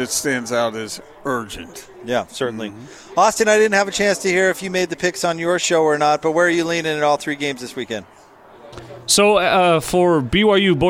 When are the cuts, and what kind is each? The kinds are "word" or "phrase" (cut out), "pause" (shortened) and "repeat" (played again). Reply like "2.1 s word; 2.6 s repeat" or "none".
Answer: 1.9 s pause

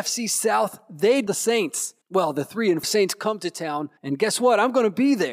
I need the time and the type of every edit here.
1.3 s phrase; 2.0 s pause; 2.8 s word; 4.0 s pause

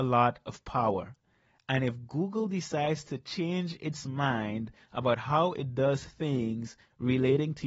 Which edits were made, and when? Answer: none

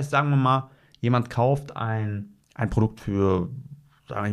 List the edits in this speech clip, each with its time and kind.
2.4 s pause

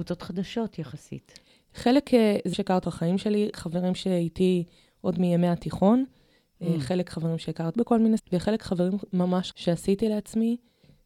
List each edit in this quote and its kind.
2.5 s word; 2.8 s word; 3.5 s word; 7.7 s word; 8.2 s word; 9.5 s word

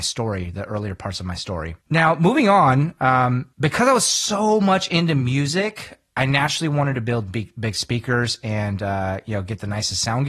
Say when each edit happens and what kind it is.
1.8 s pause; 3.5 s pause

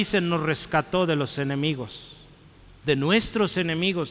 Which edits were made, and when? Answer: none

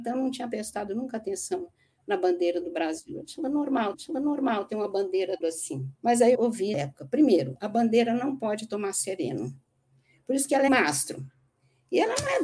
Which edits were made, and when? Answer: 3.9 s repeat; 5.4 s word; 5.9 s pause; 6.3 s word; 6.7 s word; 10.7 s phrase

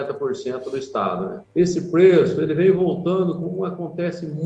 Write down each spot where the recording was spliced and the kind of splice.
1.4 s pause

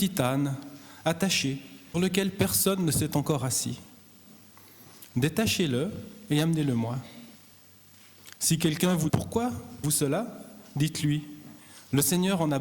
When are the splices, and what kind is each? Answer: 1.9 s word; 9.1 s word; 9.8 s word

